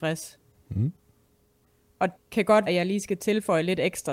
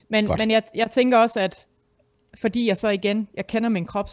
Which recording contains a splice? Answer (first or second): first